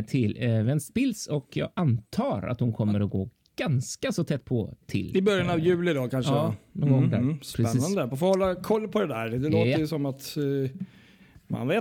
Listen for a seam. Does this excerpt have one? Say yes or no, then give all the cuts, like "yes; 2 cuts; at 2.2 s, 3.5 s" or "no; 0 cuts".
no; 0 cuts